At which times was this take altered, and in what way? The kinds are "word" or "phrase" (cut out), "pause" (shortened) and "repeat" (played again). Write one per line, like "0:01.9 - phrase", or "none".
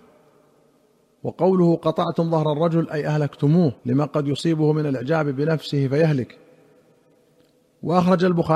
0:03.8 - pause